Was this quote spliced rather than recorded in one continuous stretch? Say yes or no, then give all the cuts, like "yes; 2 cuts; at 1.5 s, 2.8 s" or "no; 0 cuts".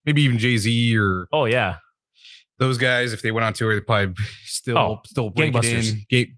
no; 0 cuts